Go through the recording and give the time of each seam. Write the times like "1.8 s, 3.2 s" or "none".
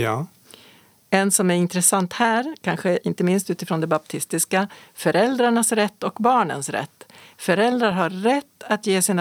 none